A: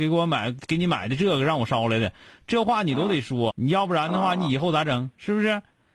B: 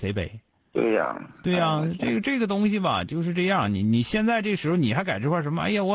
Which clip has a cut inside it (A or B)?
A